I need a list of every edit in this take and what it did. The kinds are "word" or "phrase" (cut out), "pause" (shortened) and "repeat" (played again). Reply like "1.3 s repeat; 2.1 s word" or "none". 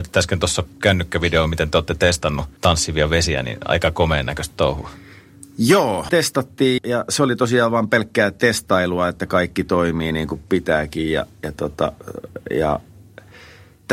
2.6 s pause; 6.1 s word; 6.8 s word